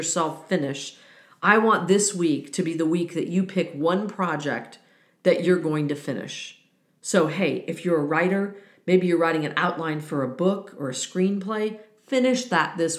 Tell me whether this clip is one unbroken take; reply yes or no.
yes